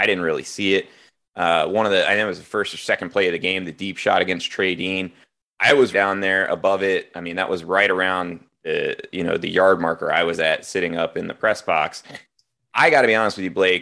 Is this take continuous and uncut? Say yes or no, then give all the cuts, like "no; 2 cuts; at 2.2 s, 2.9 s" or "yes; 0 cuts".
no; 1 cut; at 5.9 s